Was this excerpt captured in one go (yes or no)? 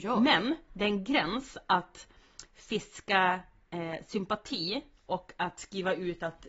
yes